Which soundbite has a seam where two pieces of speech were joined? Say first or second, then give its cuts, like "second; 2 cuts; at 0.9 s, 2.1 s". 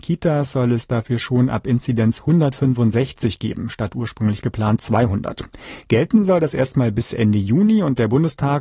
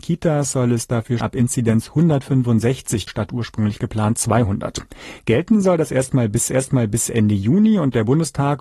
second; 3 cuts; at 1.2 s, 3.1 s, 6.5 s